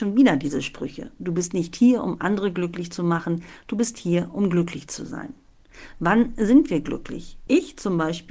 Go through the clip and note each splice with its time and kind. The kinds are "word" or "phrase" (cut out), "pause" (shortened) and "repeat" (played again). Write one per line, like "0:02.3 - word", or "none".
none